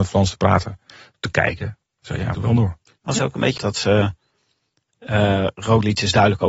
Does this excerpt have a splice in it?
yes; 3 cuts; at 2.3 s, 3.2 s, 3.6 s

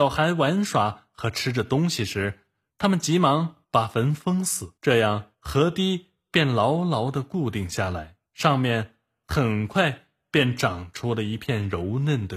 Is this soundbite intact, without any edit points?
no; 4 cuts; at 3.6 s, 4.8 s, 5.3 s, 8.3 s

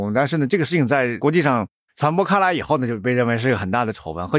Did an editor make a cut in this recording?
no; 0 cuts

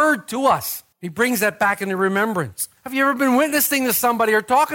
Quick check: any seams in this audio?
yes; 1 cut; at 0.9 s

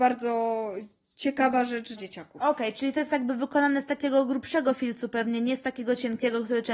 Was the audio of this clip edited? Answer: yes; 1 cut; at 2.0 s

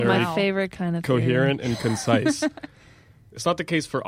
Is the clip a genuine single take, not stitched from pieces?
yes; 0 cuts

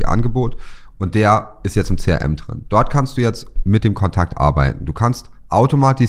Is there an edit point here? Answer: no; 0 cuts

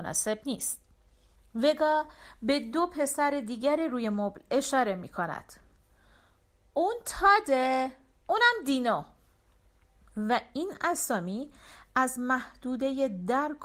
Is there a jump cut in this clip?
no; 0 cuts

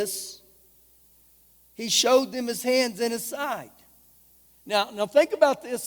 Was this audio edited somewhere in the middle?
no; 0 cuts

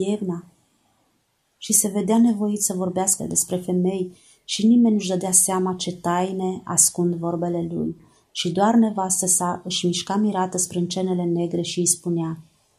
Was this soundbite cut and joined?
yes; 1 cut; at 3.2 s

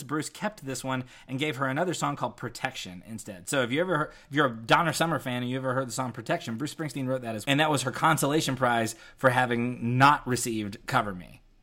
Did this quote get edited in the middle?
yes; 1 cut; at 7.4 s

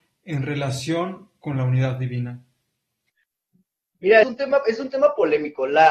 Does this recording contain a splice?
yes; 1 cut; at 4.2 s

